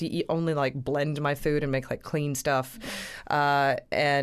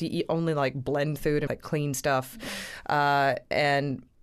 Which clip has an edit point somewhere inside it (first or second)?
second